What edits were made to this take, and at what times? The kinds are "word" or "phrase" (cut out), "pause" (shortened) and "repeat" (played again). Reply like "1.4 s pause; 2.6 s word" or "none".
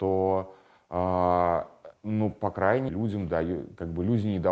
2.0 s pause; 2.9 s word